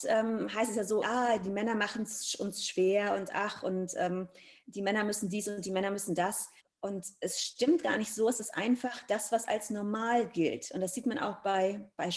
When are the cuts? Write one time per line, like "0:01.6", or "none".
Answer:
0:01.0
0:06.6